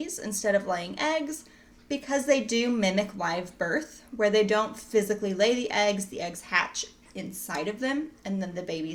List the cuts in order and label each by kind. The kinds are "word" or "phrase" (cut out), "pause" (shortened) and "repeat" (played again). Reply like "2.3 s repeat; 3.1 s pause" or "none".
none